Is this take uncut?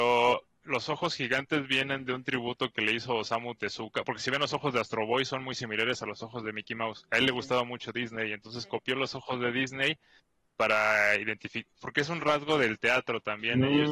yes; 0 cuts

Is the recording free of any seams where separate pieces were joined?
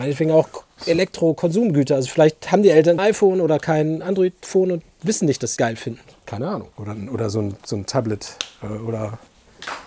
no; 4 cuts; at 3.0 s, 4.9 s, 5.6 s, 6.7 s

